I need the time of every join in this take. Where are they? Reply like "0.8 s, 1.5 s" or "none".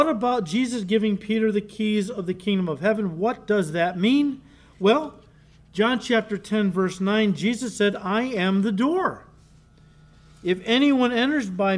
none